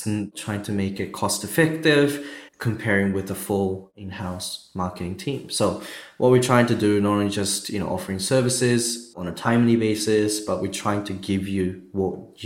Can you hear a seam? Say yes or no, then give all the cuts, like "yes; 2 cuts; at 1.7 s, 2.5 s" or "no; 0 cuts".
yes; 1 cut; at 2.5 s